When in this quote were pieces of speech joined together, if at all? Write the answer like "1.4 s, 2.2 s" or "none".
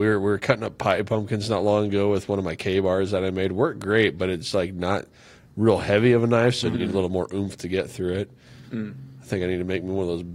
none